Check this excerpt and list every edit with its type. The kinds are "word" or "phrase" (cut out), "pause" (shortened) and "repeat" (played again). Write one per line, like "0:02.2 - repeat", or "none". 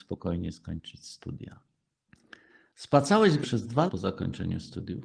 0:03.4 - word
0:03.9 - word